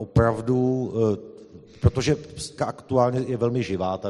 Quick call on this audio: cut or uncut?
cut